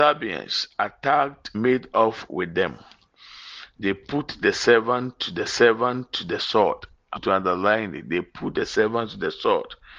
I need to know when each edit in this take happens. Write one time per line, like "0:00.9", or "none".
0:01.5
0:05.5
0:07.2